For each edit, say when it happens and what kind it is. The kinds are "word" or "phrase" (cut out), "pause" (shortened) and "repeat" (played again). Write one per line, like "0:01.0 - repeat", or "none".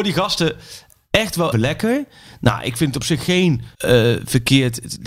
0:01.5 - word
0:03.7 - pause

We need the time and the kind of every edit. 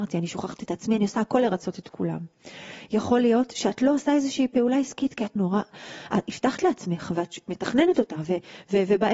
0:05.4 - word

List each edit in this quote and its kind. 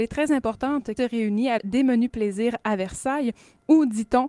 0:01.0 - phrase
0:01.6 - word

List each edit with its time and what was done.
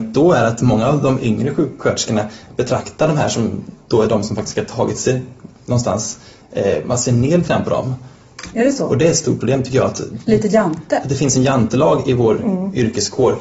none

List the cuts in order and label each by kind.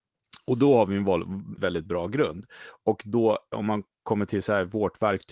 0:01.6 - word
0:03.5 - word

